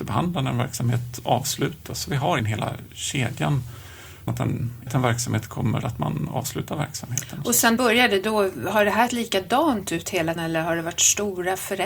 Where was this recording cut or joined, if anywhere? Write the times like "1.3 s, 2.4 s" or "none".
2.4 s, 4.3 s, 4.9 s, 5.8 s, 7.8 s, 9.1 s, 10.4 s